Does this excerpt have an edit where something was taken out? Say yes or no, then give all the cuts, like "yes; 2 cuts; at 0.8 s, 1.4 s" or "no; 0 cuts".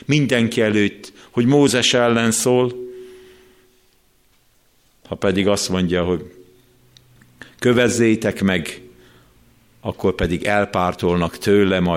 no; 0 cuts